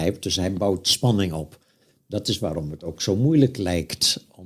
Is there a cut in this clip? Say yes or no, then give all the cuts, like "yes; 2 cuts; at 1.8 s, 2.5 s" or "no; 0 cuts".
no; 0 cuts